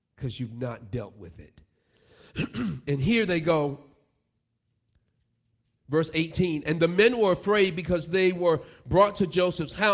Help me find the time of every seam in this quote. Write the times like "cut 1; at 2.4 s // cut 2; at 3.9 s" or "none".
none